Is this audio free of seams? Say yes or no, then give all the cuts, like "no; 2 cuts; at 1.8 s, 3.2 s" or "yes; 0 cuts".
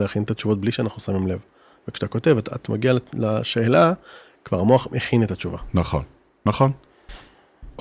yes; 0 cuts